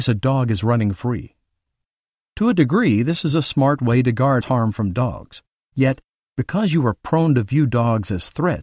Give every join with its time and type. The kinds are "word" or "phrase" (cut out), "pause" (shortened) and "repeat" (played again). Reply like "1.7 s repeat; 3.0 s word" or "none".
4.4 s word